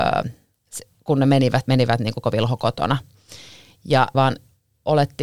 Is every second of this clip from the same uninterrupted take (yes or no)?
no